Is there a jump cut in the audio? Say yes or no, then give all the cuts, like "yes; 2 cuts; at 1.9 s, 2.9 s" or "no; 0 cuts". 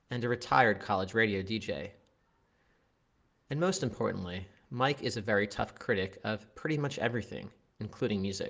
no; 0 cuts